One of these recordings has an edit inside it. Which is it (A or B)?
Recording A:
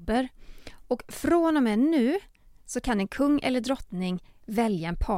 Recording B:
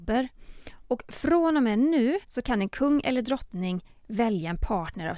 B